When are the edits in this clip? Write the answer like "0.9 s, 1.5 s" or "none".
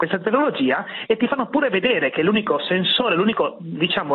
none